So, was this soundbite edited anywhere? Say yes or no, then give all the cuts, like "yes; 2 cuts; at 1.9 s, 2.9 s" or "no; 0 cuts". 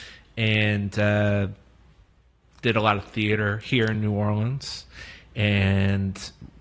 no; 0 cuts